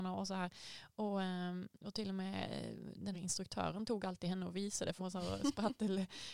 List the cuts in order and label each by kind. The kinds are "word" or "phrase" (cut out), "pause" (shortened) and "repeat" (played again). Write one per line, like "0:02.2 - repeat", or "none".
0:03.1 - word
0:05.0 - word